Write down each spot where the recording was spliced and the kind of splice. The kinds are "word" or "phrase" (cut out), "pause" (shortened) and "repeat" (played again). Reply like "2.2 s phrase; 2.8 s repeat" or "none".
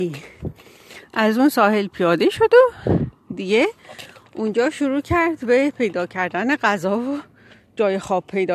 none